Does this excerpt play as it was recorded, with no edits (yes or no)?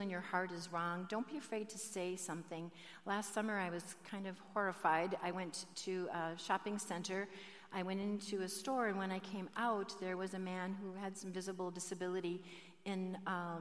yes